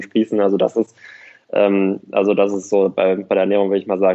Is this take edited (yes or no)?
no